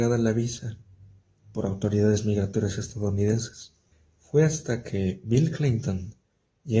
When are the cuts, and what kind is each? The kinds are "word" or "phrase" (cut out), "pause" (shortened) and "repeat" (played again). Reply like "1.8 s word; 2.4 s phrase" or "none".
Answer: 3.9 s pause